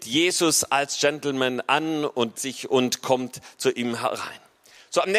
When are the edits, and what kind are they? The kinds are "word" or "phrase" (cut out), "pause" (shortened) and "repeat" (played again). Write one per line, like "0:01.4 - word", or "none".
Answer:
0:02.3 - word